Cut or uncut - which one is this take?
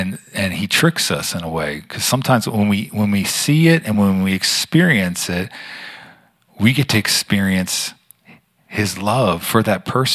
uncut